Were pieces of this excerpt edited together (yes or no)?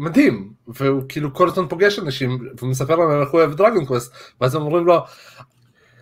no